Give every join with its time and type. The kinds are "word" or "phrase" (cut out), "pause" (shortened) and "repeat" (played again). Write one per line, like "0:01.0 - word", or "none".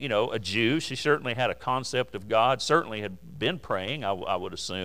none